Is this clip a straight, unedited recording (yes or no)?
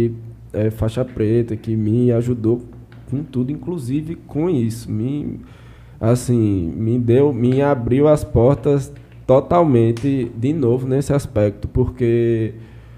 yes